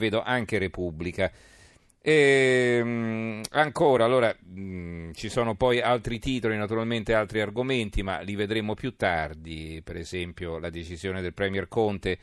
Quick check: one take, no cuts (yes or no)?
yes